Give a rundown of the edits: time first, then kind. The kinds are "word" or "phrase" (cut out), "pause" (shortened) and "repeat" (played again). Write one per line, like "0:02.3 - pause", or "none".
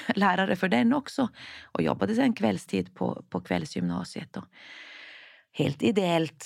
none